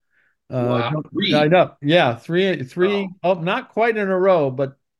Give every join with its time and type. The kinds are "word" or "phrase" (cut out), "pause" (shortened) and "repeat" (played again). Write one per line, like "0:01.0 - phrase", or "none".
none

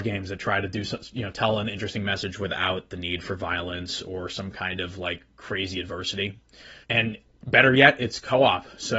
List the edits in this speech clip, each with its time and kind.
0:05.3 - pause
0:06.8 - pause

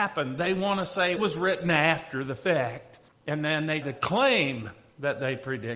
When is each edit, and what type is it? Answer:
0:01.2 - phrase
0:03.1 - pause
0:03.8 - word

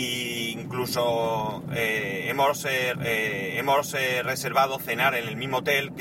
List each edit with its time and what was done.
0:02.9 - repeat

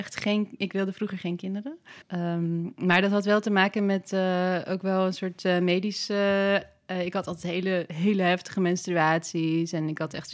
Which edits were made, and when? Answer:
0:02.0 - pause

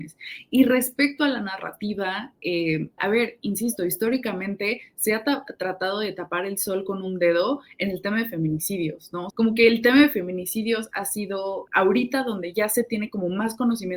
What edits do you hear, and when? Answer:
0:03.0 - phrase
0:09.3 - word
0:11.7 - word

